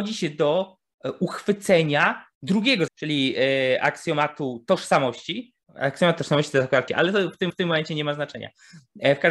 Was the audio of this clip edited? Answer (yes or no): yes